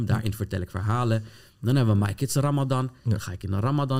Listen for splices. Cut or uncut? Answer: uncut